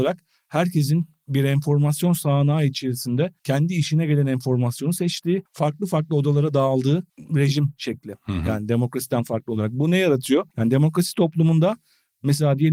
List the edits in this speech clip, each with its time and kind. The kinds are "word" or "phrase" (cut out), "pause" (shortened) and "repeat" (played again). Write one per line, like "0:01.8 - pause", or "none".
0:03.4 - pause
0:05.5 - pause
0:07.1 - pause
0:10.5 - pause